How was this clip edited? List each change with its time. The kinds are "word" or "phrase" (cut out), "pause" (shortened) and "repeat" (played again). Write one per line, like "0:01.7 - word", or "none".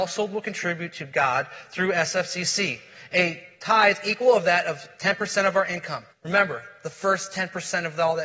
0:06.1 - pause